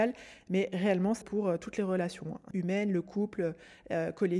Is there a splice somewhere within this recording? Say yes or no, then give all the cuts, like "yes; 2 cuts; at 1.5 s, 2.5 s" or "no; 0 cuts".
yes; 2 cuts; at 1.2 s, 2.5 s